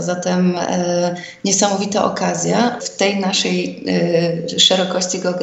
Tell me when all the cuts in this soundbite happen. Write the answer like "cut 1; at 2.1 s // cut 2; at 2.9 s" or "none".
cut 1; at 2.8 s